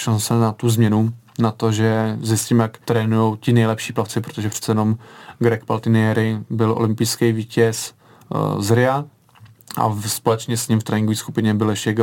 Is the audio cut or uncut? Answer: cut